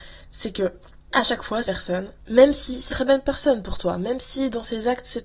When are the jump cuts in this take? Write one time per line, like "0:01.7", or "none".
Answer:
0:01.1
0:01.6
0:02.9